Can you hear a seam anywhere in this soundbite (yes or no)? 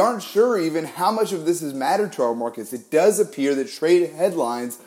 no